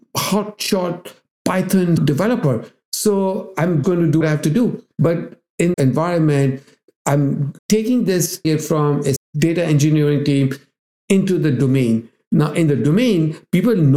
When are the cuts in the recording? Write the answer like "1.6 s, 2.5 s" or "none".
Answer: 2.0 s, 2.8 s, 3.8 s, 4.2 s, 5.7 s, 7.6 s, 8.4 s, 9.2 s